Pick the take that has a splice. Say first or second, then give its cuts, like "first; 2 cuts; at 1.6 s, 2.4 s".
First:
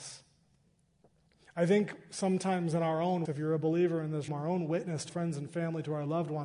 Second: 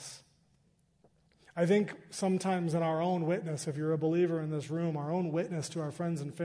first; 3 cuts; at 3.3 s, 4.3 s, 5.1 s